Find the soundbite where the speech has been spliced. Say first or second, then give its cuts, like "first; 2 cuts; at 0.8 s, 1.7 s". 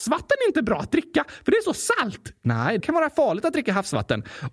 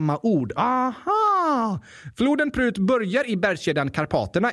first; 1 cut; at 2.8 s